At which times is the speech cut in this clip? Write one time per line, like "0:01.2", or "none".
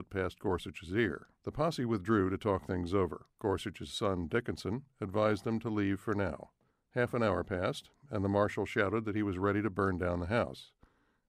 0:01.4
0:03.3
0:06.7